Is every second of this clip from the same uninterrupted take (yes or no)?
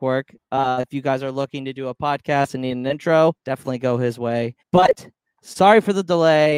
no